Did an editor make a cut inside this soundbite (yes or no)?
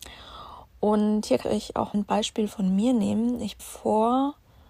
yes